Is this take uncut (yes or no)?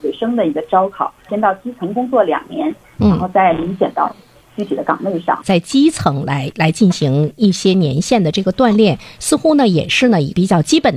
no